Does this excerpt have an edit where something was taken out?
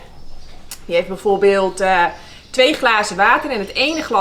no; 0 cuts

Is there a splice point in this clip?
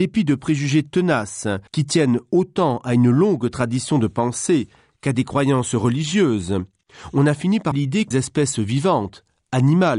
yes; 3 cuts; at 1.7 s, 7.7 s, 8.1 s

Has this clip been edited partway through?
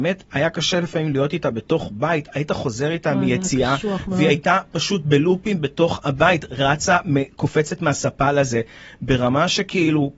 no; 0 cuts

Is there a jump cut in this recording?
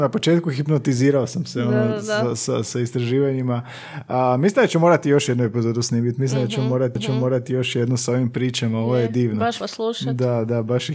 yes; 2 cuts; at 7.0 s, 9.6 s

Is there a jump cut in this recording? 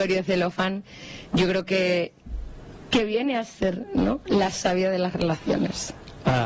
no; 0 cuts

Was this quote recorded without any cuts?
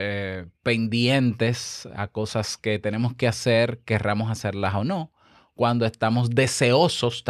yes; 0 cuts

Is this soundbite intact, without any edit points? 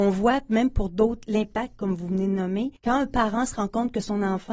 no; 1 cut; at 2.8 s

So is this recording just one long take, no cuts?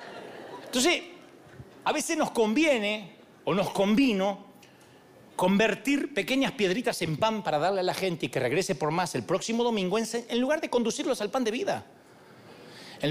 yes; 0 cuts

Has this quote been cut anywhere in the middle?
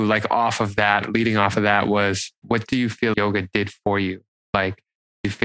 yes; 2 cuts; at 2.4 s, 3.1 s

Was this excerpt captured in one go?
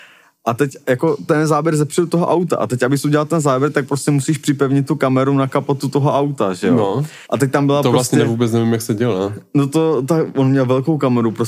no; 1 cut; at 7.2 s

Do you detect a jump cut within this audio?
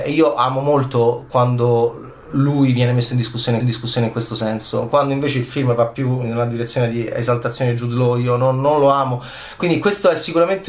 yes; 1 cut; at 3.6 s

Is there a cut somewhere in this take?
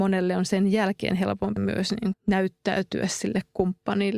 yes; 2 cuts; at 1.6 s, 2.1 s

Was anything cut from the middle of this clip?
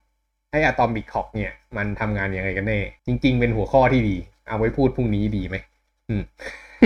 yes; 1 cut; at 3.0 s

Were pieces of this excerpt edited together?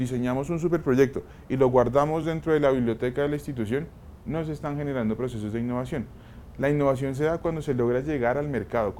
no; 0 cuts

